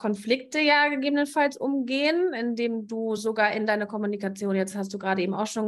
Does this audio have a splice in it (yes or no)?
no